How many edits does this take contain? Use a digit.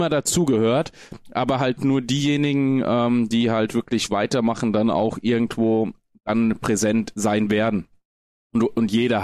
0